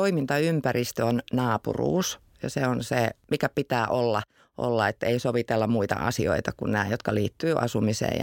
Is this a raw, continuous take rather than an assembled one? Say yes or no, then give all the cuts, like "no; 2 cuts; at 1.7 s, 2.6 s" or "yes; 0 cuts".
yes; 0 cuts